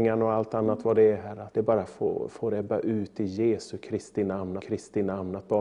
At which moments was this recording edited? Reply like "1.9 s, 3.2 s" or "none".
1.5 s, 2.3 s, 4.6 s